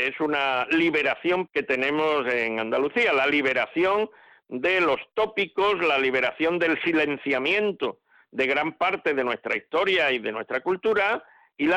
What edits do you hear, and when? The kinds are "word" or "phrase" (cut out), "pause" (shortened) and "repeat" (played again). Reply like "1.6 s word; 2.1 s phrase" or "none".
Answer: 1.5 s word